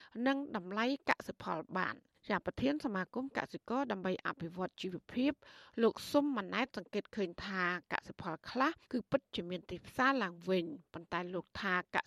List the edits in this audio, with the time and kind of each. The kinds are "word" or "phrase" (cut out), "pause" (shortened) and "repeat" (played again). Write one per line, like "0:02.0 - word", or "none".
0:02.1 - pause
0:08.8 - pause